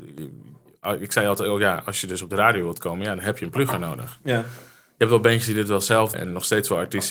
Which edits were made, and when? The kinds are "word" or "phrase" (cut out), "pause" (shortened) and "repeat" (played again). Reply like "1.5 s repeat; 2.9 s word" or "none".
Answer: 6.1 s word